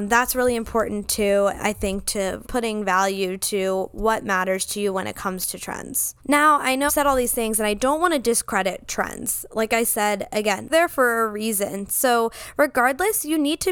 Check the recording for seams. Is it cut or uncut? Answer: cut